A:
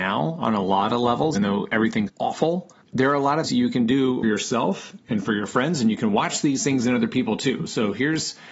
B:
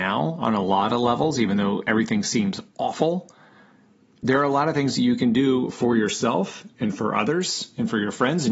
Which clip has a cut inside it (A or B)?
A